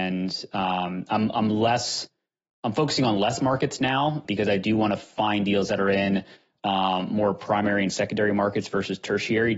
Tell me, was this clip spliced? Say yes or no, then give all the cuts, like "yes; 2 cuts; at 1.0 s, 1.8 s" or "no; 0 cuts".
yes; 1 cut; at 4.2 s